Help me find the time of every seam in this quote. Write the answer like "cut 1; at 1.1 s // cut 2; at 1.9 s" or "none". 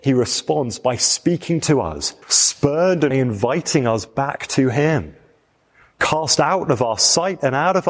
cut 1; at 2.2 s // cut 2; at 3.1 s

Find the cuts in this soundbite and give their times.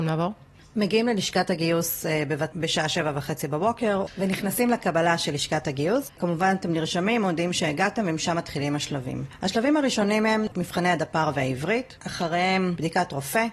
cut 1; at 2.5 s

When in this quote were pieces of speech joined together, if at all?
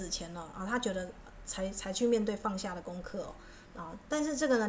cut 1; at 3.7 s

